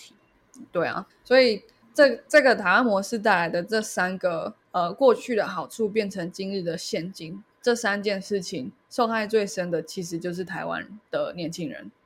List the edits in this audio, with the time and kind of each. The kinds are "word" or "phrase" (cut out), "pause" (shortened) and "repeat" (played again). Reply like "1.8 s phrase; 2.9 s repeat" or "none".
1.1 s word